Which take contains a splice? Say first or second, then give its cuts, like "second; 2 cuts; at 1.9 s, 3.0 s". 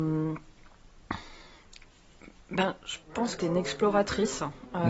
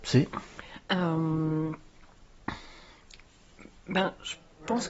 first; 2 cuts; at 3.0 s, 3.4 s